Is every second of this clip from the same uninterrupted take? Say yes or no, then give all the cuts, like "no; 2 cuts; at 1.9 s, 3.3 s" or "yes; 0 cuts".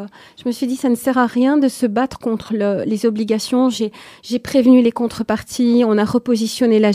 yes; 0 cuts